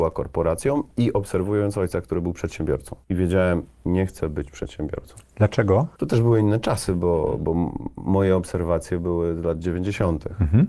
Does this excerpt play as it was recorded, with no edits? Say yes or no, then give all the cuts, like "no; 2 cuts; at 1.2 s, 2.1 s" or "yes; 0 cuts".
yes; 0 cuts